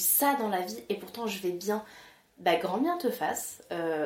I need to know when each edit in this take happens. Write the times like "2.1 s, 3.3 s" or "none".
none